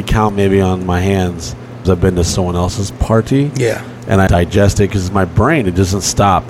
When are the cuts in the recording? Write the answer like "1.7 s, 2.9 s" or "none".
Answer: 1.8 s, 4.3 s